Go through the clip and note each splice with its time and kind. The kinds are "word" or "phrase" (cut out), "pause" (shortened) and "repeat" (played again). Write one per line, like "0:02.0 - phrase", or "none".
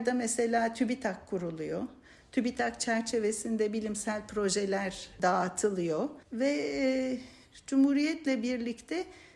0:06.2 - pause